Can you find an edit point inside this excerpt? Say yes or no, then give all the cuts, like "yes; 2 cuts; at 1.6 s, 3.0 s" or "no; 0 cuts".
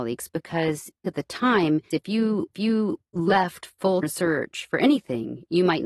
yes; 3 cuts; at 1.9 s, 2.5 s, 4.0 s